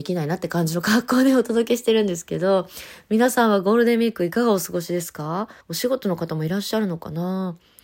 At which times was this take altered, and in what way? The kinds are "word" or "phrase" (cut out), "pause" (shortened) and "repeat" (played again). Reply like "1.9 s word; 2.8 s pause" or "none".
5.6 s pause